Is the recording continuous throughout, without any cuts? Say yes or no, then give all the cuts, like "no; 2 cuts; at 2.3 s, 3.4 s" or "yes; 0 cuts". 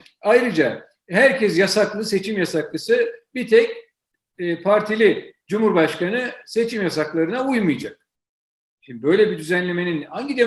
yes; 0 cuts